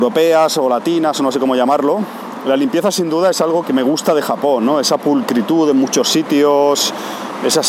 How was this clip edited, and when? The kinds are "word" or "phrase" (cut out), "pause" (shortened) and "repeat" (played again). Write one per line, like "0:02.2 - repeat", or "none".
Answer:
0:03.6 - word